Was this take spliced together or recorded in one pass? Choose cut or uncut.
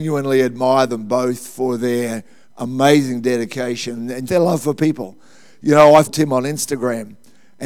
cut